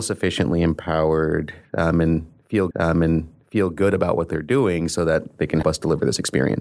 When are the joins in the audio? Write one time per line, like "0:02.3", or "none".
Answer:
0:02.7
0:05.6